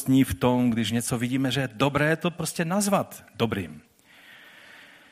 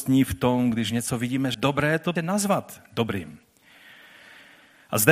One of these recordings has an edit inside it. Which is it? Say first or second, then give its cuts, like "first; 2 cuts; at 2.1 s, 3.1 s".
second; 2 cuts; at 1.5 s, 2.2 s